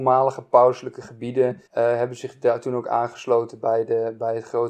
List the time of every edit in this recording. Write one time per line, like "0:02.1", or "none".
0:01.7